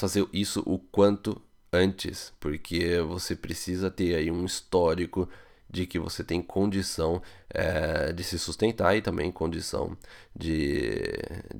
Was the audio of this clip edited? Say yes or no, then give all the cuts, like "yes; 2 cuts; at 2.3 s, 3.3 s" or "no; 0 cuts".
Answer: no; 0 cuts